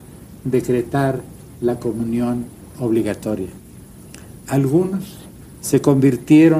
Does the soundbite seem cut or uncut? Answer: uncut